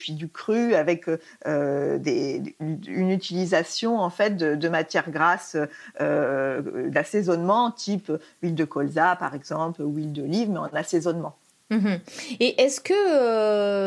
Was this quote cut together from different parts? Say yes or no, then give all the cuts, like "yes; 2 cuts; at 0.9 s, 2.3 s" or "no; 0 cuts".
no; 0 cuts